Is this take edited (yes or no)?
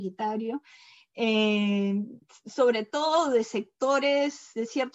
yes